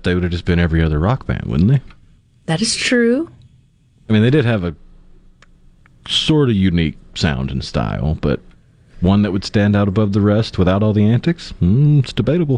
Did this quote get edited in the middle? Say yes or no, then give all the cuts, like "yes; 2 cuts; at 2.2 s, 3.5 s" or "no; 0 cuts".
no; 0 cuts